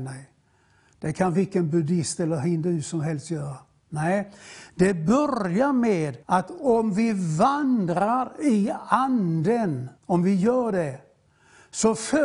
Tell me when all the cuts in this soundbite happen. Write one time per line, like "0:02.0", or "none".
0:06.2
0:10.0